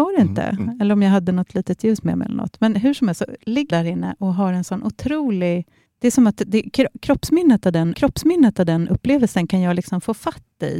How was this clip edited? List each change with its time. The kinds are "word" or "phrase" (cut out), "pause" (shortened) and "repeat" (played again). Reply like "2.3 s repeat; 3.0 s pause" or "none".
3.7 s word; 5.9 s pause; 7.9 s repeat